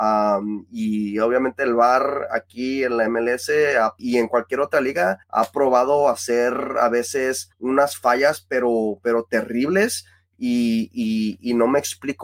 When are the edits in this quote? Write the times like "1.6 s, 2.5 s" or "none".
4.0 s, 5.2 s, 7.5 s

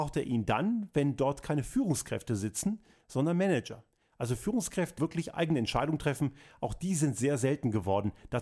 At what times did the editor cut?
5.0 s

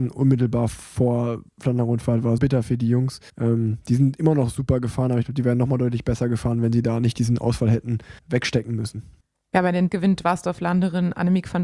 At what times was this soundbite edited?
2.4 s, 3.3 s, 8.2 s, 9.2 s, 9.9 s

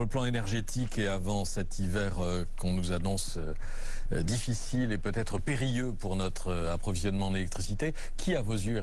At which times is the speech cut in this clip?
none

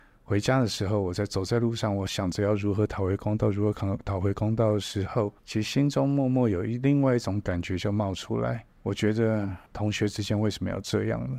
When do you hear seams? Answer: 5.4 s, 8.7 s, 9.7 s

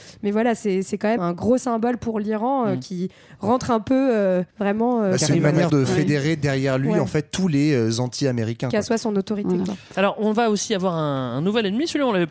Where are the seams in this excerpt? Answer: 1.2 s, 4.5 s, 5.7 s

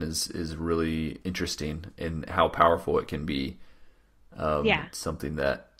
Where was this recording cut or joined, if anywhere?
none

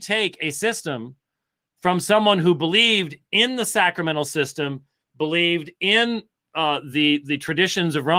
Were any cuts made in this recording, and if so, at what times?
none

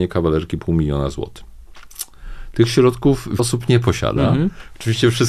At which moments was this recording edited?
3.4 s

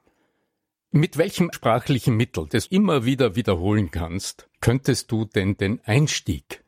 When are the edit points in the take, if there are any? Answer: 1.5 s, 2.7 s, 4.5 s

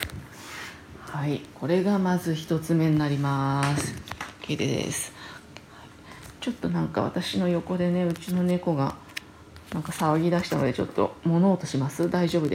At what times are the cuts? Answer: 1.5 s, 9.6 s

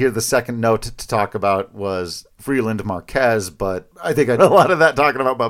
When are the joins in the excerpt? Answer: 3.9 s, 4.4 s

